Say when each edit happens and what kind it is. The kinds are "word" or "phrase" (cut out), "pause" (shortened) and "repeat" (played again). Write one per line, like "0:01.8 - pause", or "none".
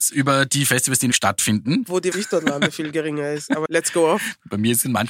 0:01.1 - word
0:02.1 - phrase
0:03.7 - word

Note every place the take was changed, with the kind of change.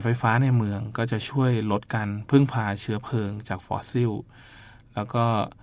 none

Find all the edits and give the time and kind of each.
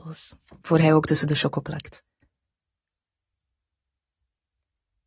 none

